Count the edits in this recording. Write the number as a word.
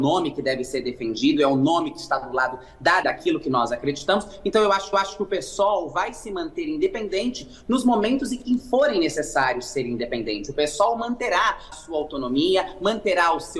three